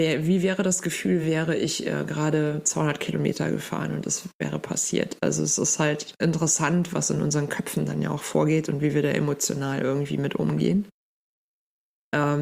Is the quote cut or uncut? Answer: uncut